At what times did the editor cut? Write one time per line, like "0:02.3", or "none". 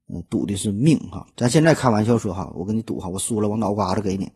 0:01.3